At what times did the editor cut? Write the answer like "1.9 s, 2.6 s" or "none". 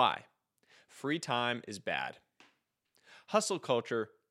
none